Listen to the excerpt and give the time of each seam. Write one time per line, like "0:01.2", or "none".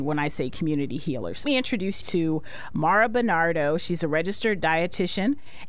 0:01.4
0:02.0